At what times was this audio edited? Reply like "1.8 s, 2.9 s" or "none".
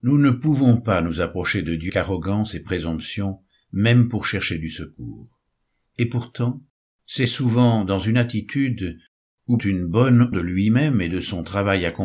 1.9 s, 9.6 s, 10.3 s